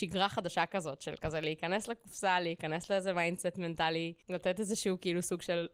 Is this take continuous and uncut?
no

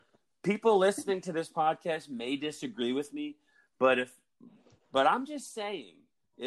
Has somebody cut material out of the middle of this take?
no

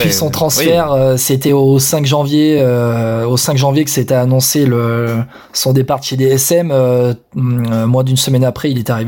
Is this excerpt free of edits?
yes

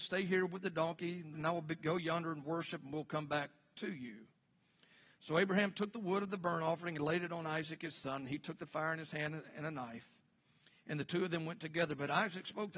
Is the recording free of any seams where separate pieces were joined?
no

